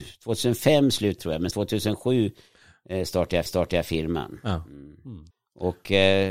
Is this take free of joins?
no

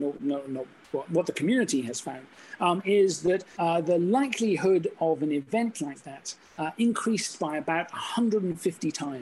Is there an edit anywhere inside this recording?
yes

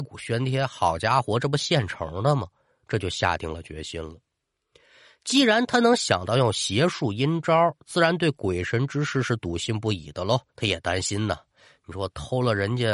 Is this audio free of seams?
no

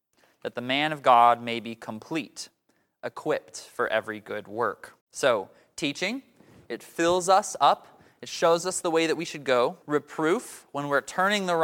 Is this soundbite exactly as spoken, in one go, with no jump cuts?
no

